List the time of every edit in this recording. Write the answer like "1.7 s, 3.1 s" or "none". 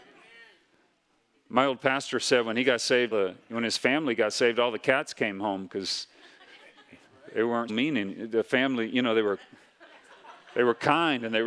3.1 s, 7.7 s

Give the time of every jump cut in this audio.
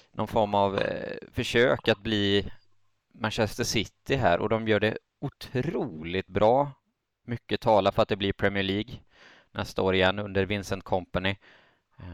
none

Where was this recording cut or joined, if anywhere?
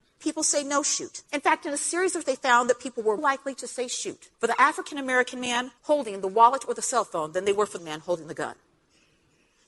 1.3 s, 2.2 s, 3.2 s, 4.3 s, 5.8 s, 7.8 s

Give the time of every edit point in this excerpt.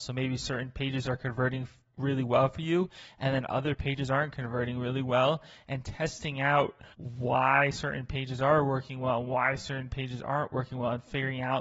6.9 s

